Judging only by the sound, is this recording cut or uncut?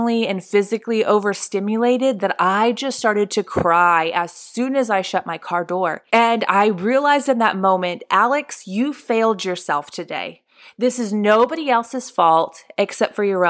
cut